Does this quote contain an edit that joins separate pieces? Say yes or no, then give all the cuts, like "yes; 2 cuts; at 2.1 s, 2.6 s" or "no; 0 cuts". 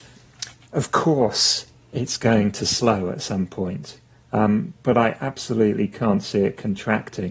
no; 0 cuts